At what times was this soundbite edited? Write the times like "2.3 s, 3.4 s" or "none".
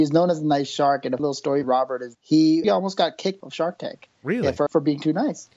1.2 s, 1.6 s, 2.1 s, 2.6 s, 3.4 s, 4.7 s